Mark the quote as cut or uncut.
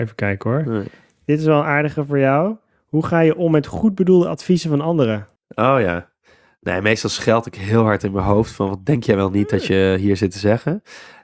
cut